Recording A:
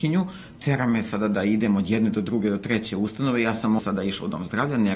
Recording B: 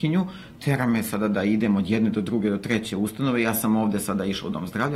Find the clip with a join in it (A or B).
A